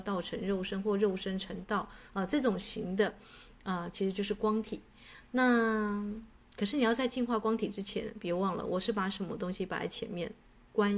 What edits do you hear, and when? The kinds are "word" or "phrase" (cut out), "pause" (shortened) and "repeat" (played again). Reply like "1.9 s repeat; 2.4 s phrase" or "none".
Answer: 3.9 s phrase; 6.4 s pause